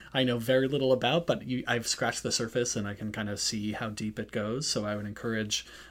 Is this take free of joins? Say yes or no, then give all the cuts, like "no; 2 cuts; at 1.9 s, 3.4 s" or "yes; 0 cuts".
yes; 0 cuts